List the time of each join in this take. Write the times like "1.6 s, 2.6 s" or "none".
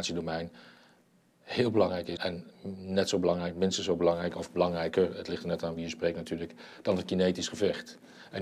2.2 s